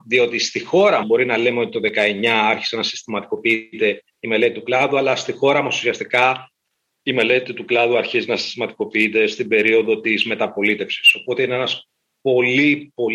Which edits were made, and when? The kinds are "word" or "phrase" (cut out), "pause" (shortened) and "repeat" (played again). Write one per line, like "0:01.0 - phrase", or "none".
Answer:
0:01.0 - word